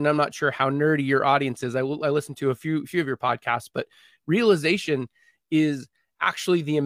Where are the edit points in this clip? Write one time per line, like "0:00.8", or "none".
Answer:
none